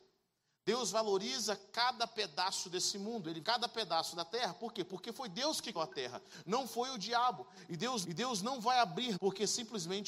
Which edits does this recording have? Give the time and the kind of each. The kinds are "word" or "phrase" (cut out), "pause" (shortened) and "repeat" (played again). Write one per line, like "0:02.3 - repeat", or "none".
0:03.4 - word
0:05.8 - word
0:08.0 - repeat
0:09.2 - phrase

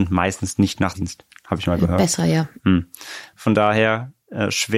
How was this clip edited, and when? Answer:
0:00.9 - word

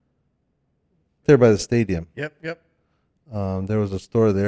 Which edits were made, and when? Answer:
0:01.2 - word

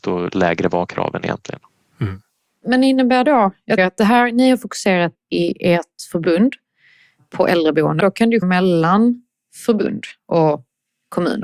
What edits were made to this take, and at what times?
0:03.2 - word
0:03.8 - word
0:05.1 - word
0:08.0 - word
0:08.4 - word

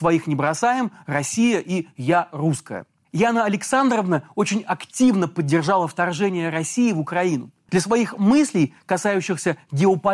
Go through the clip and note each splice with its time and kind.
none

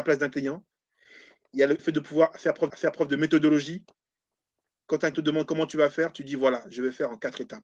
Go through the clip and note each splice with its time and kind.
0:01.8 - word
0:02.7 - repeat
0:05.1 - word

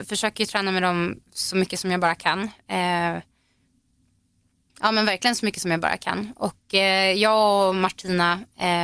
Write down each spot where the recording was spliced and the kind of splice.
none

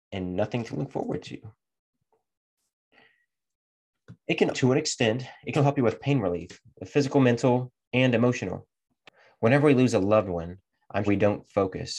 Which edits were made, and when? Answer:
0:04.5 - word
0:05.5 - word
0:11.1 - word

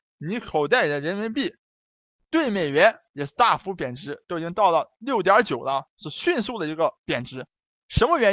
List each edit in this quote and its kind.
none

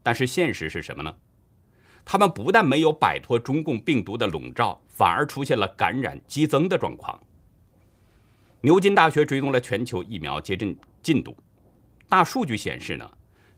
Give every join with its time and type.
none

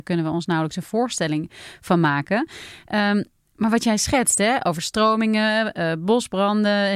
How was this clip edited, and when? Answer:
none

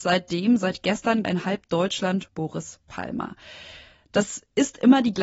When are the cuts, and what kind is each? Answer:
0:01.2 - phrase
0:02.3 - word

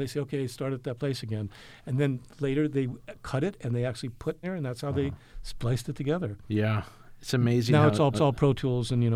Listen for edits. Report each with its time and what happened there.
0:04.4 - phrase
0:08.1 - repeat

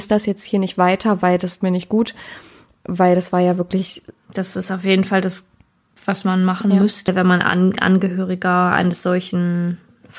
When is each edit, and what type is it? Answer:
0:01.6 - word

